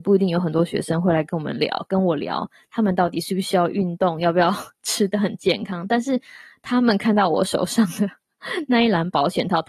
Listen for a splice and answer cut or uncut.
uncut